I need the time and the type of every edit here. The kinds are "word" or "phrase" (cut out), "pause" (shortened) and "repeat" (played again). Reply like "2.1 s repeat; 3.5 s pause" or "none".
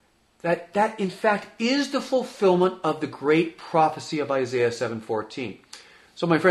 none

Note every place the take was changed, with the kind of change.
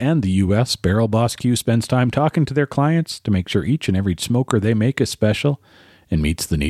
none

